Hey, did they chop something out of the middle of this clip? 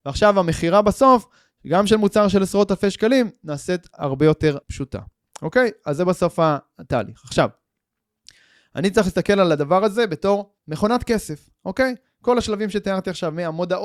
yes; 2 cuts; at 4.6 s, 10.6 s

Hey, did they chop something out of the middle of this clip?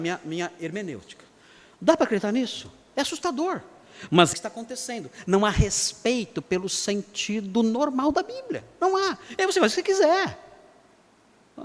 yes; 1 cut; at 4.3 s

